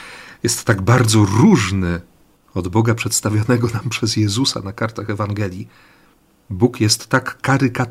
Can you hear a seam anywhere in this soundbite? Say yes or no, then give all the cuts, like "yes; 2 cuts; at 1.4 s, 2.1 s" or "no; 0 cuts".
no; 0 cuts